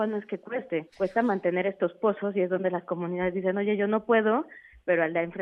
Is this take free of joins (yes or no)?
no